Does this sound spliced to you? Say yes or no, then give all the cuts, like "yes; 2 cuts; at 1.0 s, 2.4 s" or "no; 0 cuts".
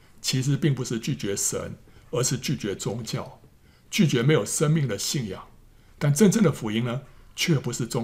no; 0 cuts